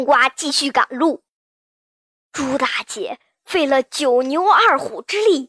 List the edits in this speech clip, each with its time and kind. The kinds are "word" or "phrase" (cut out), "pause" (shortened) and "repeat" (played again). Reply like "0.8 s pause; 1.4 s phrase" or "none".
none

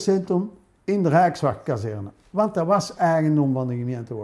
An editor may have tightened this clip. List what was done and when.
none

